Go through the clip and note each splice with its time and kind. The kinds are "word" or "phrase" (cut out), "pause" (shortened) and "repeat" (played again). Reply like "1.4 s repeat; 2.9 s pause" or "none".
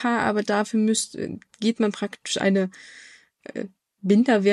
none